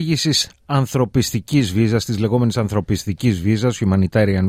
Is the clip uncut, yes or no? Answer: yes